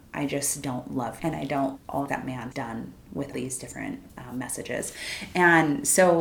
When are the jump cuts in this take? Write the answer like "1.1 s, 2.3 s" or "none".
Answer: 1.2 s, 1.8 s, 2.1 s, 2.5 s, 3.3 s, 4.1 s